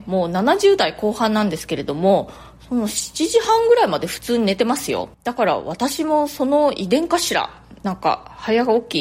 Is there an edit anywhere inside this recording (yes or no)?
yes